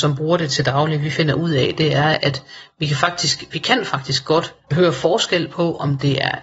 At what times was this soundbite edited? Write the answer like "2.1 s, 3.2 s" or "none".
4.6 s